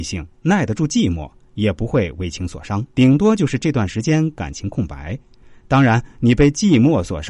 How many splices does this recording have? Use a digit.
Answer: 1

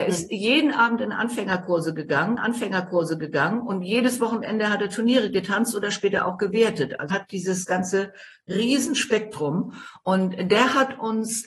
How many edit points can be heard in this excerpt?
2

